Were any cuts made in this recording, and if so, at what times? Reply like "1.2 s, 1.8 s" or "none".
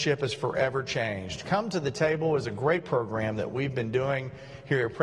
none